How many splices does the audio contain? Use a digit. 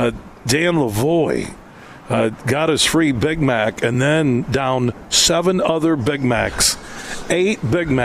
0